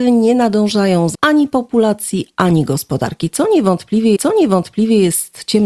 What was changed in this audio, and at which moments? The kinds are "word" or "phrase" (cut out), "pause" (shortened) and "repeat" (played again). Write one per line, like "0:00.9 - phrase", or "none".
0:01.1 - word
0:04.2 - repeat